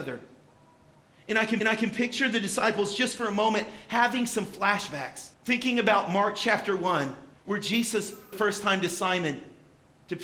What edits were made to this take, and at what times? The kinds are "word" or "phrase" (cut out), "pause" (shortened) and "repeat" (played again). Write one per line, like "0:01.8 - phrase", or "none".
0:01.6 - repeat
0:05.3 - pause
0:07.3 - pause
0:08.3 - phrase